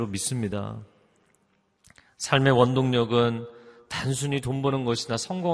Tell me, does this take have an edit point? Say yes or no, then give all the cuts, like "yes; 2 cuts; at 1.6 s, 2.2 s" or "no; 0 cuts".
no; 0 cuts